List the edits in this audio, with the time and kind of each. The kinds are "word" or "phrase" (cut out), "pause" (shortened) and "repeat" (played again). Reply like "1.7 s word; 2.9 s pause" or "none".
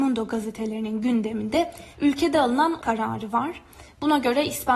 1.9 s pause; 2.8 s word